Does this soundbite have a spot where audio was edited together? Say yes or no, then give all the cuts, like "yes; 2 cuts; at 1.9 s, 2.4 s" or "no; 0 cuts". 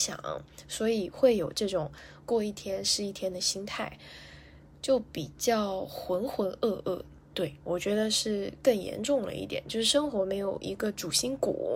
no; 0 cuts